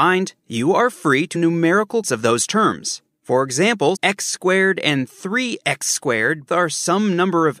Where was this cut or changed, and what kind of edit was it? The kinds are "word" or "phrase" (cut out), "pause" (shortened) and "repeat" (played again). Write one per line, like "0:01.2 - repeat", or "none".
0:01.3 - phrase
0:02.0 - word
0:04.0 - word
0:06.5 - word